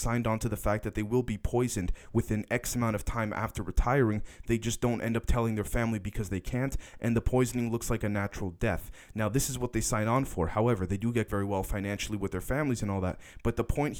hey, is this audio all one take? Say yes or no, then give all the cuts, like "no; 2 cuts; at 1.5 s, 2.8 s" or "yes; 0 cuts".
no; 1 cut; at 11.3 s